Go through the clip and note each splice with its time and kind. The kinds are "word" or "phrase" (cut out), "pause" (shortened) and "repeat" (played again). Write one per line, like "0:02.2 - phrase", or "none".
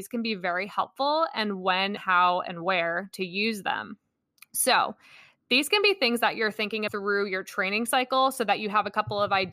0:02.0 - word
0:04.2 - pause
0:06.9 - word

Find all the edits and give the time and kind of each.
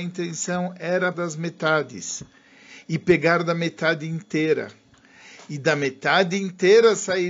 0:01.1 - word

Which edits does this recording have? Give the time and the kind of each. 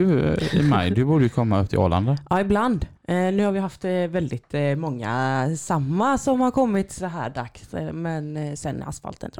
0:03.0 - pause

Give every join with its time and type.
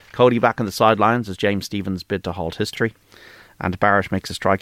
none

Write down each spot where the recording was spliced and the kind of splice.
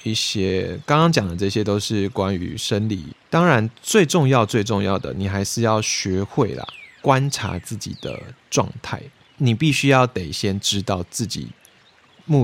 none

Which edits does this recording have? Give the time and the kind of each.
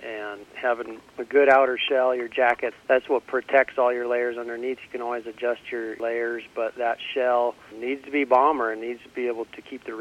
none

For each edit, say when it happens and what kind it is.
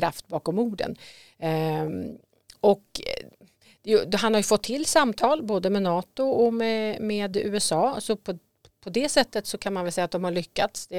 none

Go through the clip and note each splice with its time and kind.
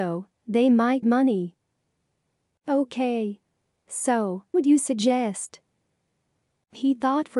0:01.0 - word
0:04.5 - word

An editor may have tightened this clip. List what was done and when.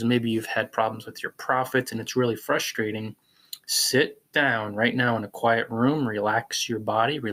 none

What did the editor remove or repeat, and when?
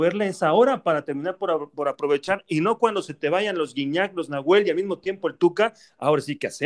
none

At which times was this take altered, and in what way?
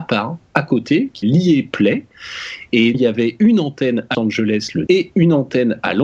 0:01.2 - word
0:02.9 - word
0:04.1 - word
0:04.9 - word

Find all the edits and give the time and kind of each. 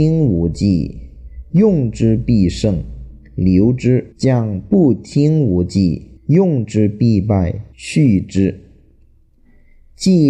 0:04.1 - pause
0:06.2 - pause
0:07.7 - pause

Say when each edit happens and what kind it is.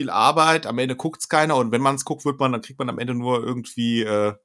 none

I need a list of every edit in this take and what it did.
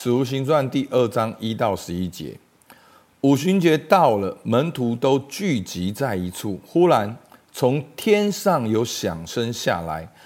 none

